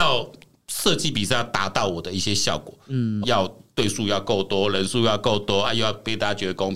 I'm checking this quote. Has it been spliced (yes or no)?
yes